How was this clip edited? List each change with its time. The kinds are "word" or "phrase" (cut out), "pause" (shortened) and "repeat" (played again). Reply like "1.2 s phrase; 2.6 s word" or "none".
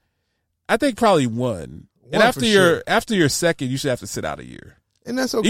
none